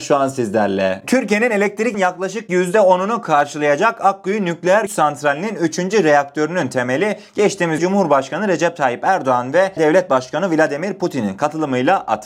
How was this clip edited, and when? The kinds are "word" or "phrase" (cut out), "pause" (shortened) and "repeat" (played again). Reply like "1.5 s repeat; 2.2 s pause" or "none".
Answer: 1.9 s word; 4.9 s word; 7.8 s word; 9.8 s word